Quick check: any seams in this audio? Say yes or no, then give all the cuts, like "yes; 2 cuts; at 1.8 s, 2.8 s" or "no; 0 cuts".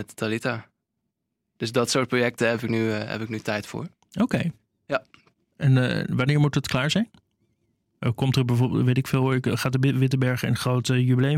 no; 0 cuts